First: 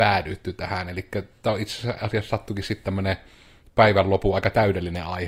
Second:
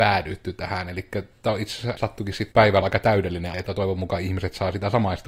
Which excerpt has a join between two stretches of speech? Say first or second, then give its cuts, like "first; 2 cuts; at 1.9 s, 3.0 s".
second; 4 cuts; at 2.0 s, 2.5 s, 2.8 s, 3.5 s